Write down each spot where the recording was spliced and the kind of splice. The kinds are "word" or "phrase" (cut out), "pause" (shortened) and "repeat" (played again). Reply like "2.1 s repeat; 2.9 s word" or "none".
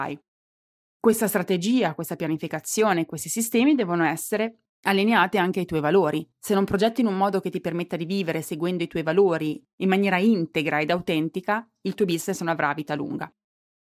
6.3 s pause